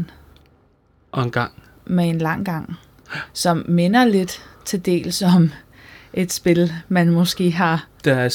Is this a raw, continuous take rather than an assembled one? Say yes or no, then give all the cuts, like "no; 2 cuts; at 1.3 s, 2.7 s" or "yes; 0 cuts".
yes; 0 cuts